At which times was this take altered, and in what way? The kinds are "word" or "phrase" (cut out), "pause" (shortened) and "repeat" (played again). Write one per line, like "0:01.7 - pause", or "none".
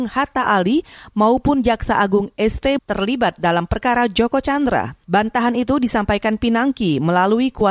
0:02.8 - word
0:05.0 - pause